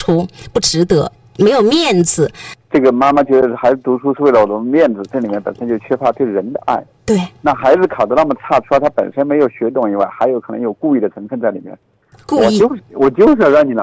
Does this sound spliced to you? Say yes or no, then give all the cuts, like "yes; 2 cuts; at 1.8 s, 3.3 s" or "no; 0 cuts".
no; 0 cuts